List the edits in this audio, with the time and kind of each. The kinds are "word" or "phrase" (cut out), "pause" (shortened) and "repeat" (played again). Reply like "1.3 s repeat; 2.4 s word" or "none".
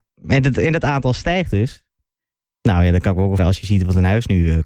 3.4 s word